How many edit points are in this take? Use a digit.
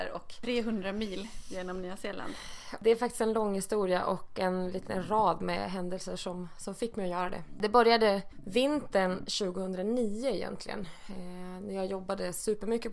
0